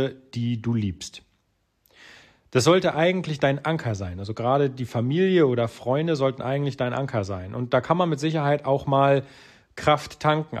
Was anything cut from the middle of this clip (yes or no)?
no